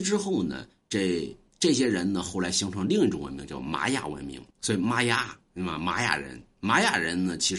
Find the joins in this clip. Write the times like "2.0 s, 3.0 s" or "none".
4.5 s